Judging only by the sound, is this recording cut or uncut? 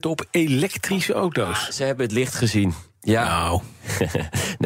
uncut